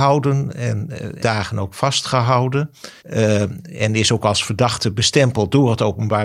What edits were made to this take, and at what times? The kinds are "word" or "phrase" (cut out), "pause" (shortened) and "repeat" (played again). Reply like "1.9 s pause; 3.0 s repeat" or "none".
1.2 s word; 3.0 s pause